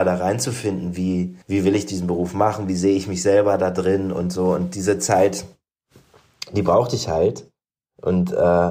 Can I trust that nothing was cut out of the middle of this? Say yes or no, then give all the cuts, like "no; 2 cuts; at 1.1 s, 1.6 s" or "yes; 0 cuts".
no; 1 cut; at 1.4 s